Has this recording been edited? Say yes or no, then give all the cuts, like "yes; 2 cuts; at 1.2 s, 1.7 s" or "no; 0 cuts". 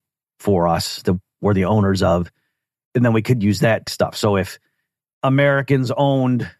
yes; 1 cut; at 3.9 s